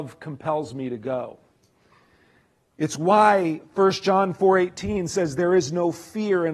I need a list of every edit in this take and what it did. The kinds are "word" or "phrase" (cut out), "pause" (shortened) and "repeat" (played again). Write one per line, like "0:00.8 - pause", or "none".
none